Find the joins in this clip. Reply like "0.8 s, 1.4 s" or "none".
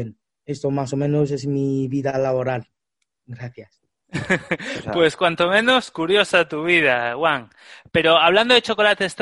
none